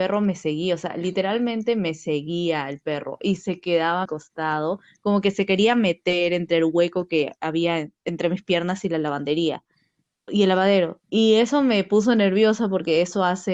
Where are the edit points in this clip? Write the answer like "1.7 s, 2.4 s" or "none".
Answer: 4.0 s, 10.3 s, 11.0 s